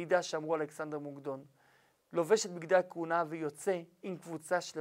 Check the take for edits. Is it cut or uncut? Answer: uncut